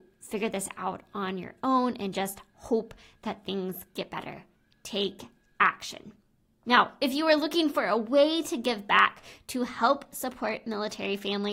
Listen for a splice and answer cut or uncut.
uncut